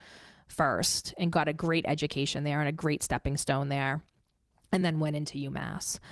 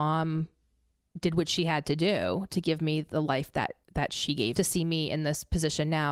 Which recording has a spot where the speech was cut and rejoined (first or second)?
second